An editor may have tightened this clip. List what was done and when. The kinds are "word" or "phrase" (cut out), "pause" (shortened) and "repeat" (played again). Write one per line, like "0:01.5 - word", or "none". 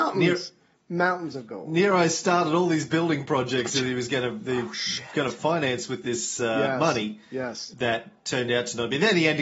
none